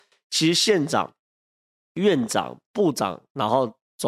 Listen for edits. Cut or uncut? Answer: uncut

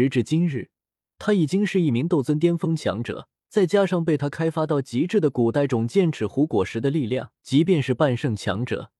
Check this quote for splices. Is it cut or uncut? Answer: cut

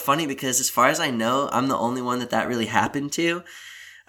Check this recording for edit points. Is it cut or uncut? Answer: uncut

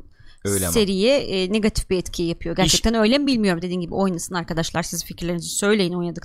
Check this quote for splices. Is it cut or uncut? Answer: cut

